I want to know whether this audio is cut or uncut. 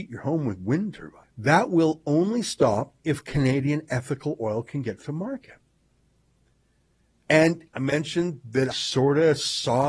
cut